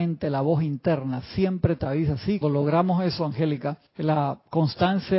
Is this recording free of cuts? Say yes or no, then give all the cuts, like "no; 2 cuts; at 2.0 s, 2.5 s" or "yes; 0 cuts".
no; 2 cuts; at 2.4 s, 3.9 s